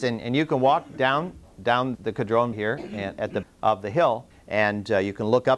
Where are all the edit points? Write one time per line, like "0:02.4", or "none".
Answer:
0:01.9
0:02.5
0:03.4
0:04.3